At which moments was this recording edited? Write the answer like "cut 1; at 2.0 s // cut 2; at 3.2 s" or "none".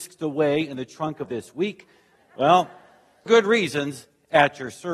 cut 1; at 1.2 s // cut 2; at 3.3 s